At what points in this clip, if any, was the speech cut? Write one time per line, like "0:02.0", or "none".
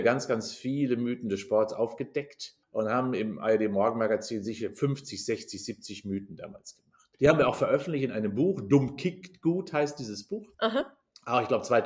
0:02.6
0:07.1
0:10.5